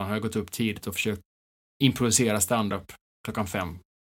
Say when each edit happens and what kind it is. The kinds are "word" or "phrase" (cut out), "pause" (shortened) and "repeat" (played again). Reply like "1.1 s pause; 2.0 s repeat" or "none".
none